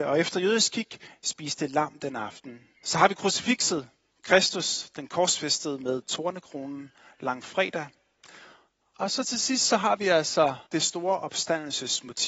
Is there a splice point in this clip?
yes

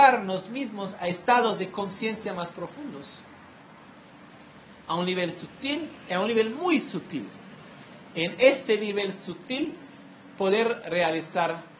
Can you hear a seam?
no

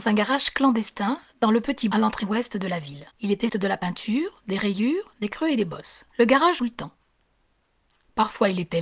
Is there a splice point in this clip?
yes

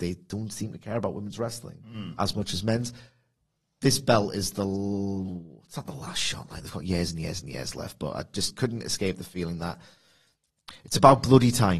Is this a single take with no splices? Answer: yes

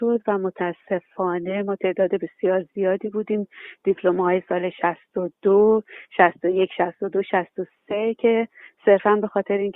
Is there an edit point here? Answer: no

